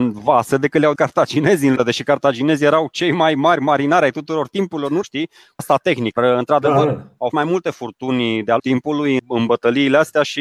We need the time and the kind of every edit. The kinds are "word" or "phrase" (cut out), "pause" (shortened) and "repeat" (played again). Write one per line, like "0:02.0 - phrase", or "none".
0:00.9 - word
0:01.8 - word
0:05.0 - word
0:05.6 - word
0:06.2 - word
0:07.3 - word
0:08.6 - word
0:09.2 - word